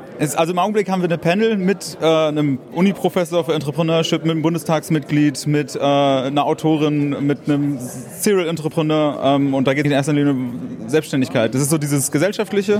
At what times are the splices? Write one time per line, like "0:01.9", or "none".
0:09.8